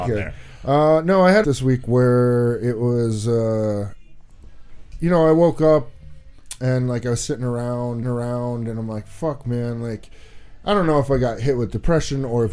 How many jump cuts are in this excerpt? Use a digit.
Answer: 2